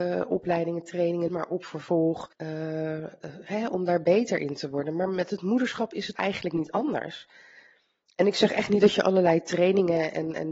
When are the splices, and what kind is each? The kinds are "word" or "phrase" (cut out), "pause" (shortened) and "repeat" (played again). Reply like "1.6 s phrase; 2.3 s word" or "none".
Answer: 1.3 s phrase; 2.3 s pause; 6.2 s word